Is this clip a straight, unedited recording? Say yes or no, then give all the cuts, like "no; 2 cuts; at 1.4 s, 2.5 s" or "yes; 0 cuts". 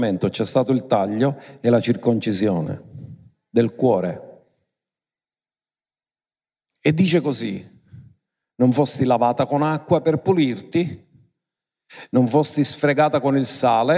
yes; 0 cuts